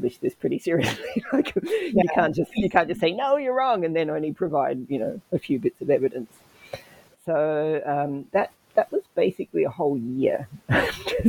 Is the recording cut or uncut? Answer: uncut